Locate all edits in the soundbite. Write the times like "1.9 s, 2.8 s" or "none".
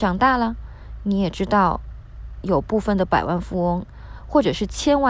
none

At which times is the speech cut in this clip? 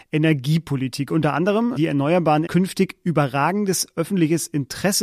1.8 s, 2.5 s

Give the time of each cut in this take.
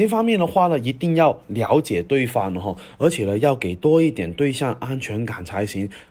none

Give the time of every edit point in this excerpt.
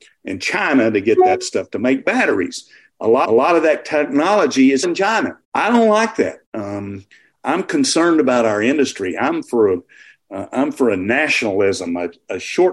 3.2 s, 4.8 s, 5.4 s, 6.4 s

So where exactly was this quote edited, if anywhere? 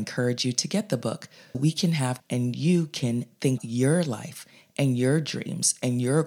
1.5 s, 2.2 s, 3.6 s

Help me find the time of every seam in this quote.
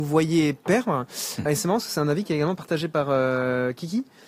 1.5 s

